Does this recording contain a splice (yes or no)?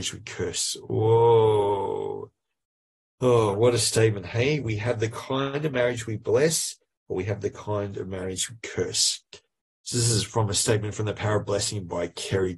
no